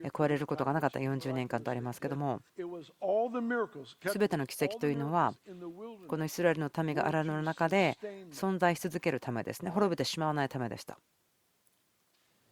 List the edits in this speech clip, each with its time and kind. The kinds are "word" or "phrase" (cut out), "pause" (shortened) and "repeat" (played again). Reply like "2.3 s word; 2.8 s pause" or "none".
2.5 s pause